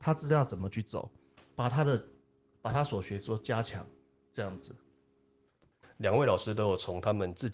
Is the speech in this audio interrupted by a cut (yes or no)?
no